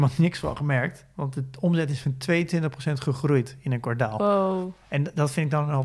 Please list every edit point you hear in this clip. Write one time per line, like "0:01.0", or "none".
none